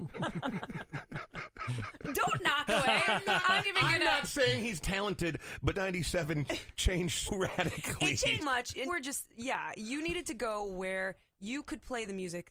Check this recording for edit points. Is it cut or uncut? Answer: cut